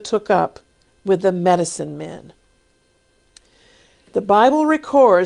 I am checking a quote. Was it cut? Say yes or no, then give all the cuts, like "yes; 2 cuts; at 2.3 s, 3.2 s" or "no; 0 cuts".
no; 0 cuts